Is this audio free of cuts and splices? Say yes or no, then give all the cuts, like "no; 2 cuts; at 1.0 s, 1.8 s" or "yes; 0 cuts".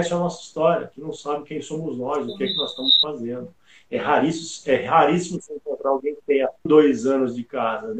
no; 1 cut; at 6.7 s